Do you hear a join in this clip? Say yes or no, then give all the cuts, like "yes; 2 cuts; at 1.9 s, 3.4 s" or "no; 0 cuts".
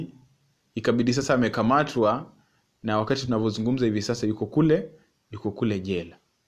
no; 0 cuts